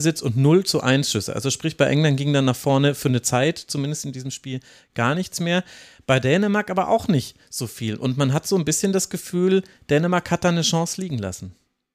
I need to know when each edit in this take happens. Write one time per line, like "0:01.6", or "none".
none